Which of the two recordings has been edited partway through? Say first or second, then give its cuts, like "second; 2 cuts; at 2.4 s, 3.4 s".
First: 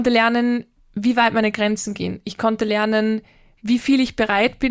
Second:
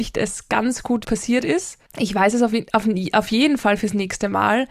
second; 2 cuts; at 1.0 s, 1.9 s